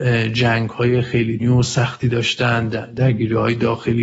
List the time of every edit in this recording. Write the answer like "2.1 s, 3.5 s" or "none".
1.4 s